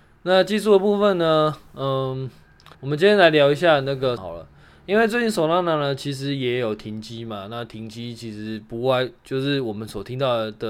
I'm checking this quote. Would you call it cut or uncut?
cut